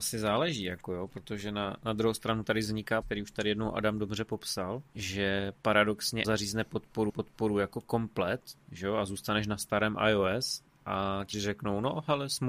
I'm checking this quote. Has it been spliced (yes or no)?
yes